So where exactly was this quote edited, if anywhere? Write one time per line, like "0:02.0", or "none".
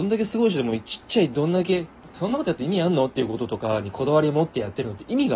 0:02.1